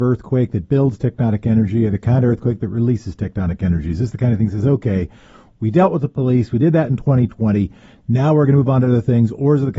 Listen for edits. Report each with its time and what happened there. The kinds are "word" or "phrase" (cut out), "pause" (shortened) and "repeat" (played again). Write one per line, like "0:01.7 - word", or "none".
none